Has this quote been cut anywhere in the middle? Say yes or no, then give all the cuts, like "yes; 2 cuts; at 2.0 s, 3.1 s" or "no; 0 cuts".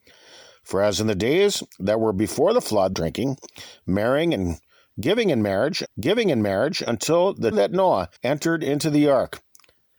yes; 4 cuts; at 2.9 s, 5.9 s, 7.5 s, 8.2 s